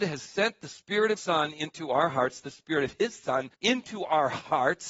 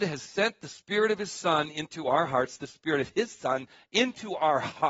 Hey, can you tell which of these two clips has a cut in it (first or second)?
first